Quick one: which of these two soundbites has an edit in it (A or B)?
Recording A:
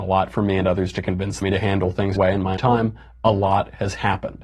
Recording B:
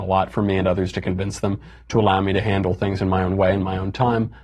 A